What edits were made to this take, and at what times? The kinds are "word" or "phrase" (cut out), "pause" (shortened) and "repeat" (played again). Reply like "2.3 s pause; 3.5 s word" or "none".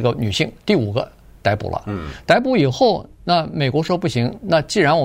none